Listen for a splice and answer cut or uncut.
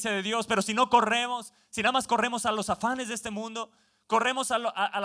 uncut